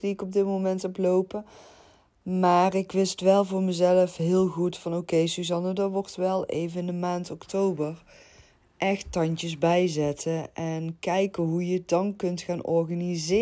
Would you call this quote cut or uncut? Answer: uncut